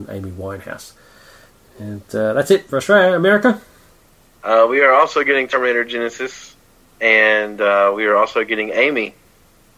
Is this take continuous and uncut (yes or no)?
yes